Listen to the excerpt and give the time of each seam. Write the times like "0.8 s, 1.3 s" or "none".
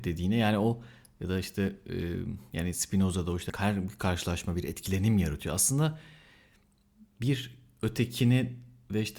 none